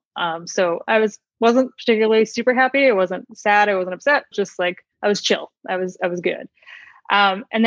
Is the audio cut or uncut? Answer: cut